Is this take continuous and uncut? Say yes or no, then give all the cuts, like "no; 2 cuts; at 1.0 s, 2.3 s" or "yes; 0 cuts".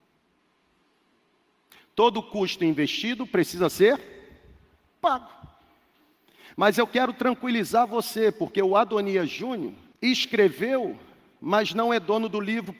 no; 1 cut; at 9.9 s